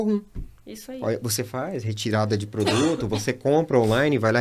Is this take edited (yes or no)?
no